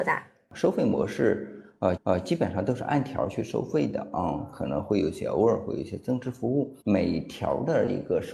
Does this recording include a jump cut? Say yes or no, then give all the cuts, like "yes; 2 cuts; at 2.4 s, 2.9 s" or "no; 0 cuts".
yes; 2 cuts; at 2.0 s, 6.8 s